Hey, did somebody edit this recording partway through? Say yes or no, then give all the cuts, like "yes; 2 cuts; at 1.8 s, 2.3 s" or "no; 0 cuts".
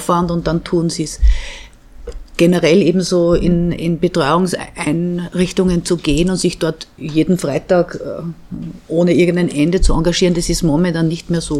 no; 0 cuts